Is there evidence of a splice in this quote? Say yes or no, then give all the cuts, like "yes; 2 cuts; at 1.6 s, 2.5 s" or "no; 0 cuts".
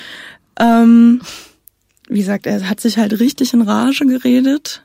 no; 0 cuts